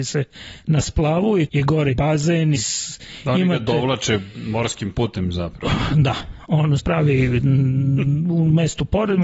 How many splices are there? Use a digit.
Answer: 4